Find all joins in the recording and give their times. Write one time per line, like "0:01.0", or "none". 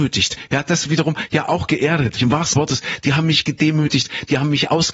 0:02.2
0:02.5